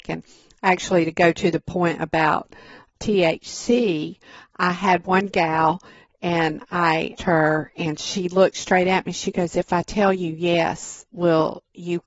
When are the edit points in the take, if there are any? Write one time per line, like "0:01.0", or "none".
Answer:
0:02.9
0:07.2

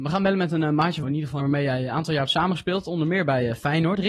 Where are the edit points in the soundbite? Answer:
0:01.0
0:01.4

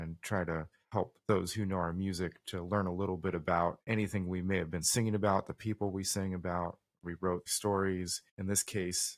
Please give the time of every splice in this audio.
0:03.8
0:07.5
0:08.3

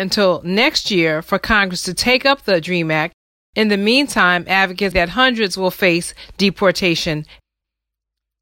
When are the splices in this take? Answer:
0:04.9

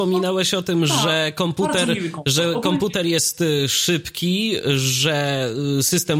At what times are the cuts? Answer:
none

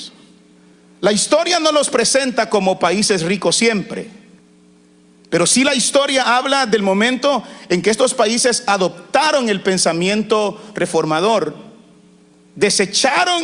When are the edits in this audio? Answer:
0:04.4

